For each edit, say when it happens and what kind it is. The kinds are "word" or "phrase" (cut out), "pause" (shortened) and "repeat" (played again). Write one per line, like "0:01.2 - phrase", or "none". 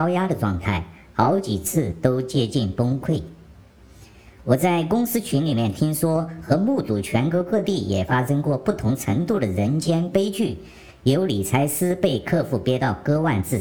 none